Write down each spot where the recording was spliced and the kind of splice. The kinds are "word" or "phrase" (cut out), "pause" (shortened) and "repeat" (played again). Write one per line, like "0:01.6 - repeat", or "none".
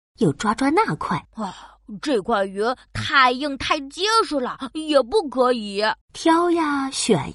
0:01.2 - pause
0:06.0 - pause